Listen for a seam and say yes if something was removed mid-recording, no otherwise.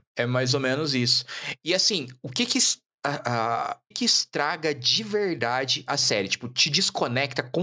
yes